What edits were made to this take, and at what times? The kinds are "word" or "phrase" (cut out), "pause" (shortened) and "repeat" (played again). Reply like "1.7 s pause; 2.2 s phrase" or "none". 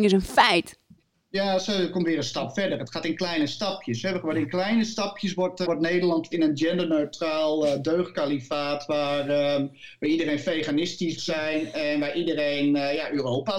5.7 s word; 6.3 s word; 11.2 s word